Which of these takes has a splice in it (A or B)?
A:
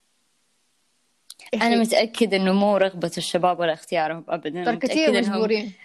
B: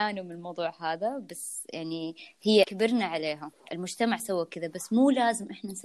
B